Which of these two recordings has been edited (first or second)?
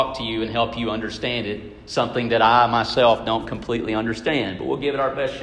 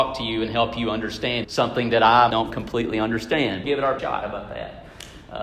second